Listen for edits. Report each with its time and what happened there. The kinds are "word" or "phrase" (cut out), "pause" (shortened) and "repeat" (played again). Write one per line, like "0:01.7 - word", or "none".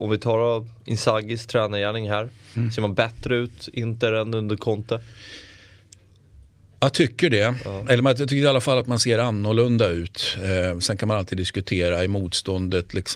none